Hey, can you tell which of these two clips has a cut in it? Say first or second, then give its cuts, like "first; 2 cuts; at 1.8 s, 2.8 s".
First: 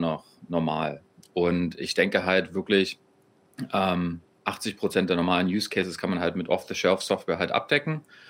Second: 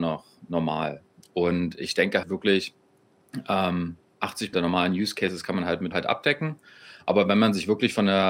second; 3 cuts; at 2.2 s, 4.5 s, 5.9 s